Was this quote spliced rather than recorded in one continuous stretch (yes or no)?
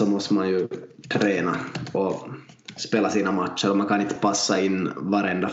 no